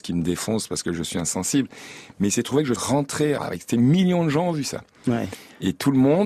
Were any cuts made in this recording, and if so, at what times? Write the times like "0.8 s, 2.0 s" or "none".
2.8 s, 3.4 s